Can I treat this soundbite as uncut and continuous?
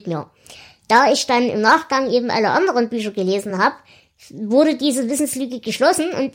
yes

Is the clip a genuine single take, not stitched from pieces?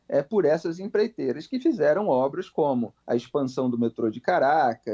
no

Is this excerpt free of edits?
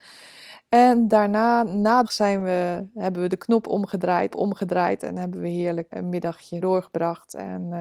no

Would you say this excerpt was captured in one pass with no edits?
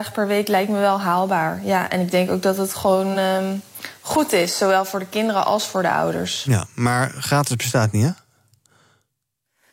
yes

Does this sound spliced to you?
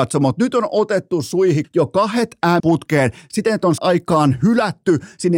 yes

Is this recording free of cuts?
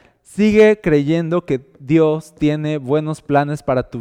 yes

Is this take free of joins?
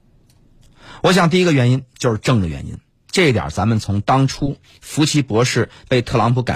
no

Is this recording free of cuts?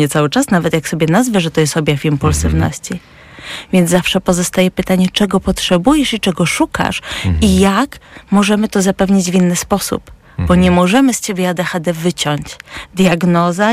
yes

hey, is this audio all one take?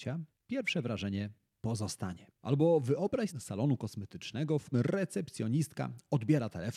no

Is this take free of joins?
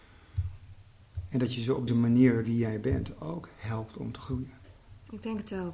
no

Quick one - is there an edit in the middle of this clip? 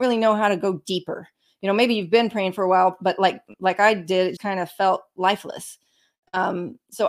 yes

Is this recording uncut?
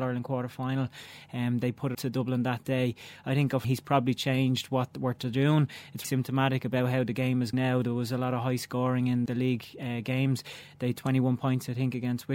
no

